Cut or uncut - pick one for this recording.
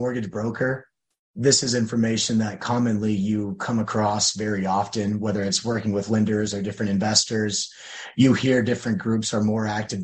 uncut